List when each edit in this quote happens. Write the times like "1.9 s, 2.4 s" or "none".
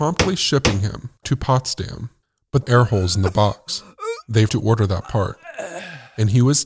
1.2 s, 2.6 s, 4.5 s